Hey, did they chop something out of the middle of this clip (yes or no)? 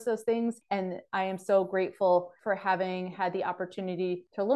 no